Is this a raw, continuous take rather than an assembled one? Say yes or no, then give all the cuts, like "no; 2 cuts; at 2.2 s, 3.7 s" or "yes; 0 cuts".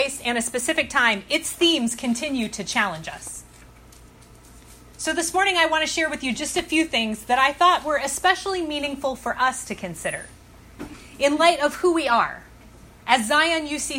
yes; 0 cuts